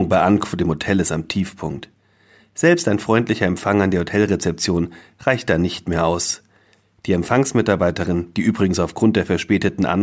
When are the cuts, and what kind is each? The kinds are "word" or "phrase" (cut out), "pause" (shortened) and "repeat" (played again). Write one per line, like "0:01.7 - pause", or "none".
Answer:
none